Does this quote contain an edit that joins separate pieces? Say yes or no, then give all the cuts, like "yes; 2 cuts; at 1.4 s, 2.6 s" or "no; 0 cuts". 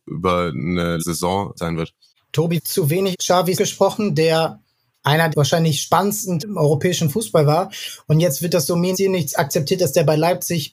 yes; 8 cuts; at 1.0 s, 1.6 s, 2.6 s, 3.1 s, 3.6 s, 5.3 s, 6.4 s, 8.9 s